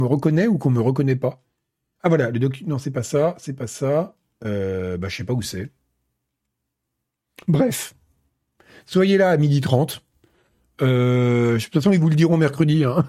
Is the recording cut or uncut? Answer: uncut